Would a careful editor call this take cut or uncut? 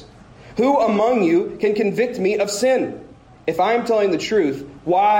uncut